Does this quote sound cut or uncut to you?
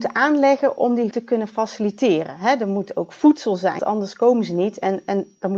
cut